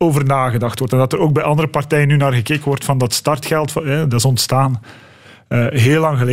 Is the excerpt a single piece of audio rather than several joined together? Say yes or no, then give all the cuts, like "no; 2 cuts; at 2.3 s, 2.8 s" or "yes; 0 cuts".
yes; 0 cuts